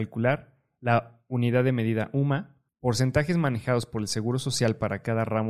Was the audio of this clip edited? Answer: no; 0 cuts

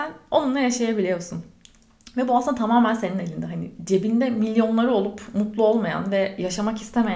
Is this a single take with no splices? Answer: yes; 0 cuts

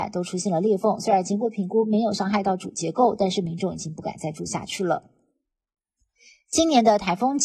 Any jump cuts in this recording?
no; 0 cuts

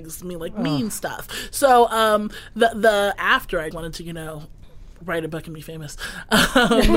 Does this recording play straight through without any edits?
no; 2 cuts; at 3.1 s, 3.7 s

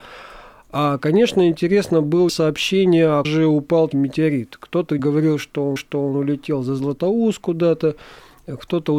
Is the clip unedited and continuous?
no; 5 cuts; at 2.3 s, 3.2 s, 3.9 s, 5.0 s, 5.8 s

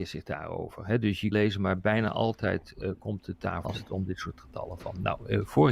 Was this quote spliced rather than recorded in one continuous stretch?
yes; 2 cuts; at 1.3 s, 3.6 s

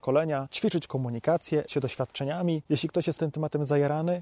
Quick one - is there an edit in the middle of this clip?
yes; 2 cuts; at 1.7 s, 3.2 s

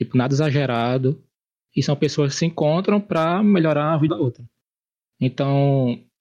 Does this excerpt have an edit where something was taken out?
yes; 1 cut; at 4.1 s

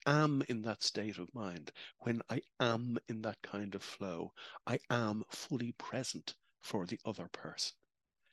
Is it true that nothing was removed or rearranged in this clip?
yes; 0 cuts

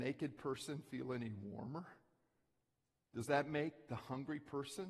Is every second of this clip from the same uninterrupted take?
yes; 0 cuts

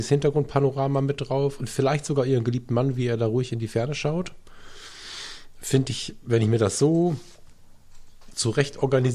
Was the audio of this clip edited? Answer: no; 0 cuts

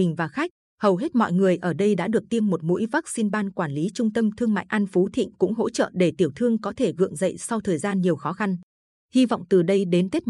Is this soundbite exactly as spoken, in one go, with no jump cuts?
yes; 0 cuts

